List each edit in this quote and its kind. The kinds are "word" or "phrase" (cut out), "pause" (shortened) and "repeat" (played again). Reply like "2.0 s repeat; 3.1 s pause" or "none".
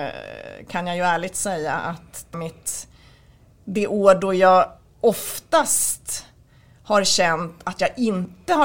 2.3 s word